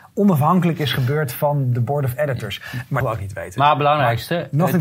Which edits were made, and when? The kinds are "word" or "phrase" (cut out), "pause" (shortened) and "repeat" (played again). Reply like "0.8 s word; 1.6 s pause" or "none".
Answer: 3.0 s phrase